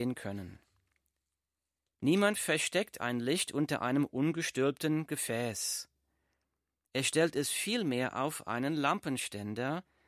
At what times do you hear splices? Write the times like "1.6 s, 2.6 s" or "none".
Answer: none

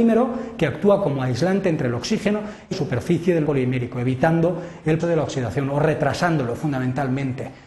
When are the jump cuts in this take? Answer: 2.7 s, 3.4 s, 5.0 s

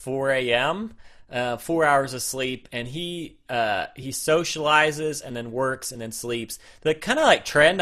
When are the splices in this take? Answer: none

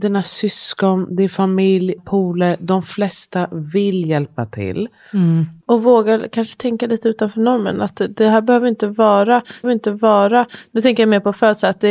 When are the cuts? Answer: 2.0 s, 5.6 s, 9.6 s

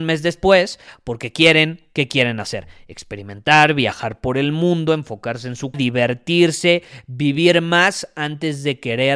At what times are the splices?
5.7 s

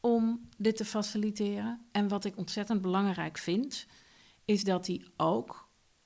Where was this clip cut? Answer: none

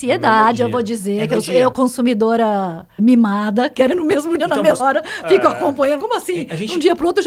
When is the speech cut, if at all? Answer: 1.7 s, 3.0 s, 3.9 s, 4.4 s, 4.8 s, 6.0 s

